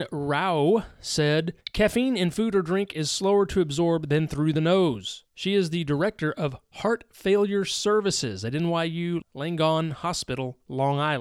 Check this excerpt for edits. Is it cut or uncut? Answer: cut